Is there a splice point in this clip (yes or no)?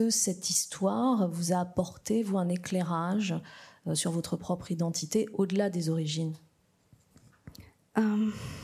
no